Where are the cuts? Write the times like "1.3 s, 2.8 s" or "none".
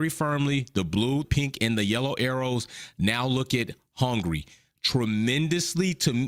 1.2 s